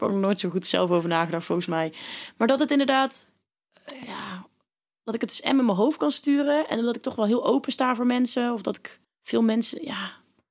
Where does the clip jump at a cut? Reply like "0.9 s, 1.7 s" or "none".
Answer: 9.0 s

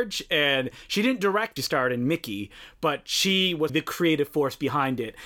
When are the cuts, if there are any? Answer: 1.6 s, 3.7 s

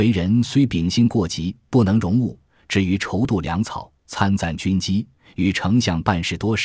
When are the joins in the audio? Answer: none

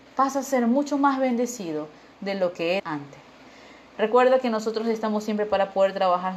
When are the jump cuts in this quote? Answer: 2.8 s

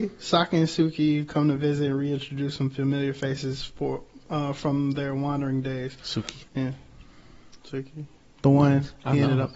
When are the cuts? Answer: 6.5 s

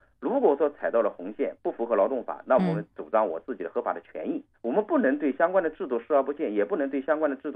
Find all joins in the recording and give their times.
4.5 s

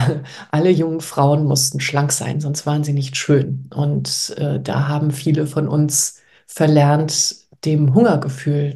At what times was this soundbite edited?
none

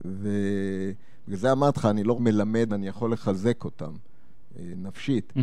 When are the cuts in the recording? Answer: 2.1 s, 2.7 s

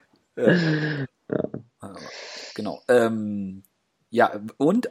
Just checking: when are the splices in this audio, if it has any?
none

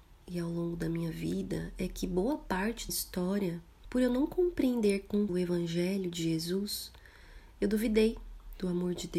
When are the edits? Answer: 2.9 s, 5.3 s

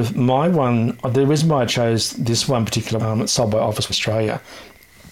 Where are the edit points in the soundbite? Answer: 3.0 s, 3.9 s

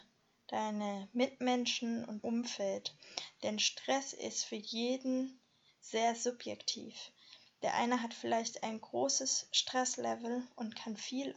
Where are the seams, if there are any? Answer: 2.2 s

